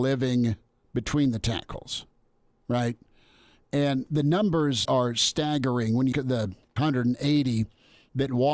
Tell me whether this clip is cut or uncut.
cut